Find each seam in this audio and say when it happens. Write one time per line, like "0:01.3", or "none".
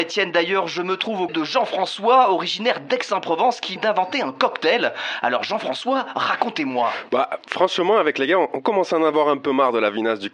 0:01.3
0:03.8